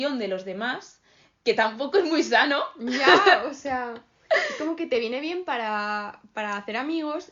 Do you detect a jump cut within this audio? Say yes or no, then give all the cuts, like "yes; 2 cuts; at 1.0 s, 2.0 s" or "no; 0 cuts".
no; 0 cuts